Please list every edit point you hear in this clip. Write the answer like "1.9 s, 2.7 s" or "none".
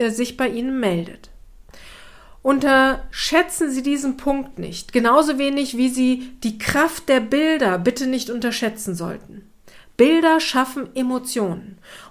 none